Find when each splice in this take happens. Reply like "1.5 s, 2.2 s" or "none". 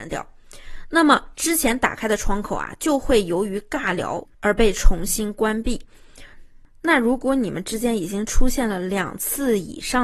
4.3 s